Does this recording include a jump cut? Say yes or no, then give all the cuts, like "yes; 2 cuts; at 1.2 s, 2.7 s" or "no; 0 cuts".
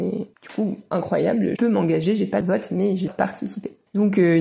yes; 3 cuts; at 1.6 s, 2.4 s, 3.1 s